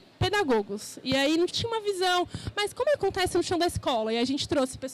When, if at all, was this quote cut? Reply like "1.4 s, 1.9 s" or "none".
1.5 s, 3.0 s